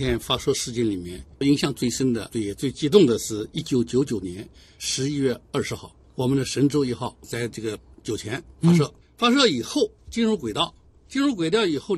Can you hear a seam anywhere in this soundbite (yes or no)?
no